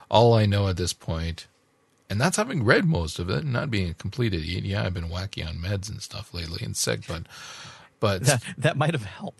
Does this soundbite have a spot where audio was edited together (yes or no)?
no